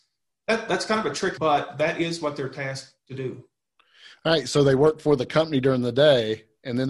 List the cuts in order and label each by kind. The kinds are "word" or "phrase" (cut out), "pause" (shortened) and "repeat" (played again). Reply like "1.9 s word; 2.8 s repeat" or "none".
1.4 s word